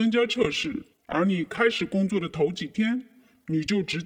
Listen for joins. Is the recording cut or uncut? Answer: cut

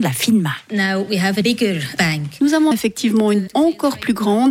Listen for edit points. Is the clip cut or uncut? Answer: cut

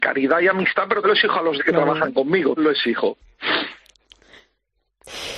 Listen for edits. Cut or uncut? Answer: cut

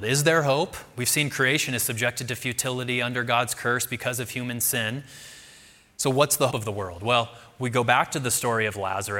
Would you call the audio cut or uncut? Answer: cut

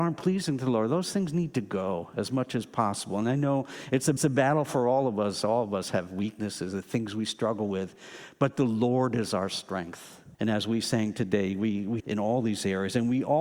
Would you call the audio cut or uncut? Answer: cut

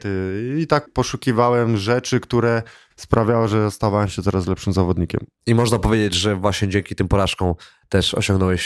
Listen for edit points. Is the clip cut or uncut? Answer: uncut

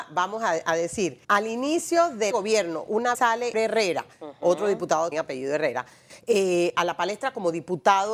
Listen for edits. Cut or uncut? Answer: cut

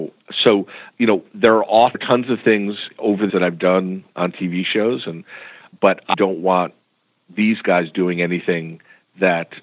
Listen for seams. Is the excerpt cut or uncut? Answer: cut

